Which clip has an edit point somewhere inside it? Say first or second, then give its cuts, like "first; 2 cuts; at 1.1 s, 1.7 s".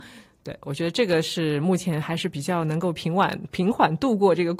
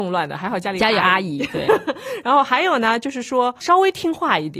second; 1 cut; at 3.6 s